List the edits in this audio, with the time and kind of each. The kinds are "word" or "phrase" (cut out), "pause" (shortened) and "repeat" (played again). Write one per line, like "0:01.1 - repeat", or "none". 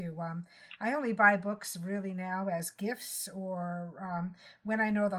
none